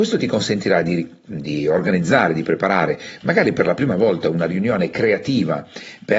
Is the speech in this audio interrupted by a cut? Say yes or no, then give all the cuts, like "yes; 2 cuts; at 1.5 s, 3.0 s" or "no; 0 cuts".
no; 0 cuts